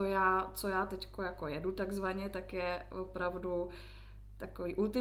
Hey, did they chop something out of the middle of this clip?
no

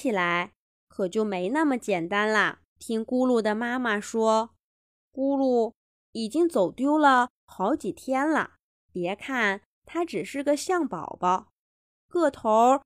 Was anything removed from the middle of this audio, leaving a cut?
yes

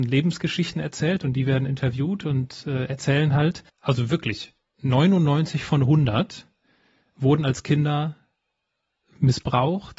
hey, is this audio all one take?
no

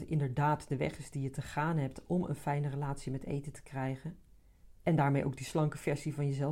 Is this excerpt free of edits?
no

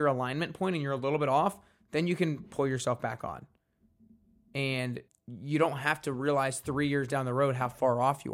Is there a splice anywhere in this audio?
yes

